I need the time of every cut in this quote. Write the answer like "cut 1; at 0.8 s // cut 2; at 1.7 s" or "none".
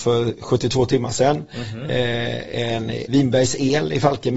cut 1; at 3.1 s